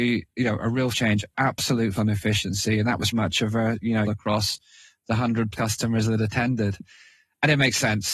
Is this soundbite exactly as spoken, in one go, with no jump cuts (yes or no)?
no